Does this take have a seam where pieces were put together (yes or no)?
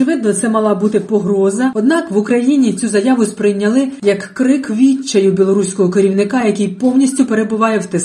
no